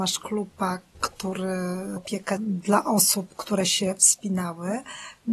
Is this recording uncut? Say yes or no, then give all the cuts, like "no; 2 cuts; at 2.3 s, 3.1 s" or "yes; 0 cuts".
no; 2 cuts; at 2.0 s, 2.4 s